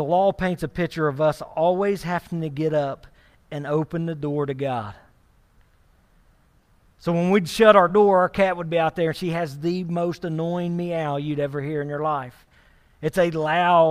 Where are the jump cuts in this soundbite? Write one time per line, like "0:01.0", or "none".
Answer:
none